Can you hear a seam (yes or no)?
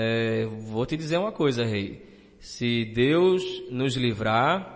no